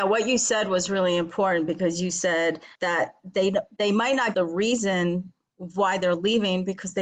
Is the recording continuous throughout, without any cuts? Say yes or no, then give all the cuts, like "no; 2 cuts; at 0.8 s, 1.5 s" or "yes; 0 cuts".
no; 2 cuts; at 2.8 s, 4.3 s